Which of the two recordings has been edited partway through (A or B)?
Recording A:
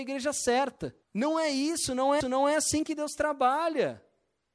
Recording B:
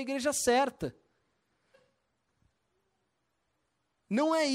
A